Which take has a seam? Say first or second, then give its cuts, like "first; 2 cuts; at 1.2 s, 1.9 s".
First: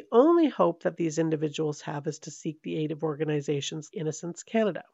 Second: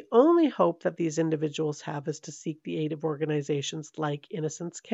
first; 1 cut; at 3.9 s